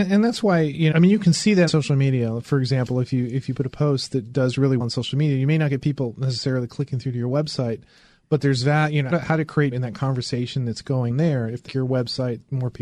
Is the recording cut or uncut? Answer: cut